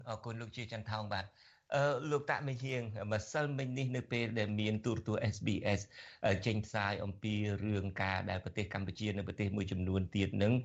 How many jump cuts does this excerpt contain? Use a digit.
0